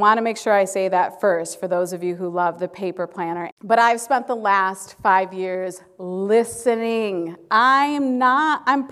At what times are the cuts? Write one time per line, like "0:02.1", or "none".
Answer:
0:03.6